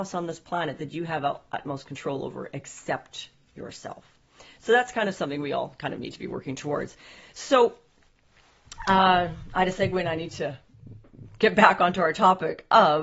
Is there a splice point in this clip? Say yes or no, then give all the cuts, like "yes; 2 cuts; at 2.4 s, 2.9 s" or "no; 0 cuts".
no; 0 cuts